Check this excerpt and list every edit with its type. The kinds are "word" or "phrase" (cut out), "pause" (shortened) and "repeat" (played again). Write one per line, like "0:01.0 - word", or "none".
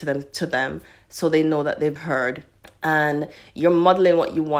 0:02.0 - word
0:02.6 - pause